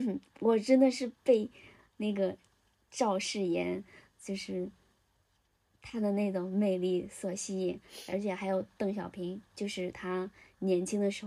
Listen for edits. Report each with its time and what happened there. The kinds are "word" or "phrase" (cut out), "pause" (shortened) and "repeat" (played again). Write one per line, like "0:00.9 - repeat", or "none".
none